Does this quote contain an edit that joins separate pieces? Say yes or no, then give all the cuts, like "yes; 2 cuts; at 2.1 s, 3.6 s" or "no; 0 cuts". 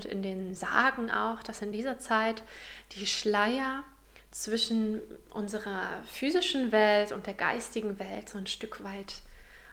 no; 0 cuts